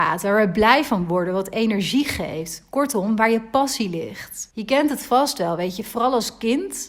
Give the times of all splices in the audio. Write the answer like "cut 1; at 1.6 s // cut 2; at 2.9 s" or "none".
cut 1; at 4.5 s